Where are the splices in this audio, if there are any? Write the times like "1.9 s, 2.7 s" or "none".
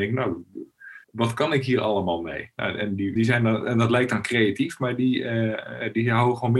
1.0 s, 3.2 s